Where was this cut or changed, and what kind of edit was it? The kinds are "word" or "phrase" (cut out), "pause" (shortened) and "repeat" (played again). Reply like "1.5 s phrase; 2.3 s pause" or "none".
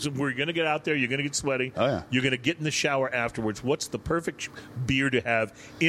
none